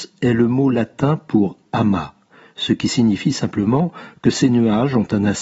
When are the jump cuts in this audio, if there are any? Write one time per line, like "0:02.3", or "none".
none